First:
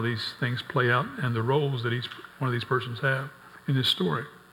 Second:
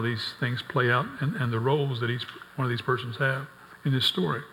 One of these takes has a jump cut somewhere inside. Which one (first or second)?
first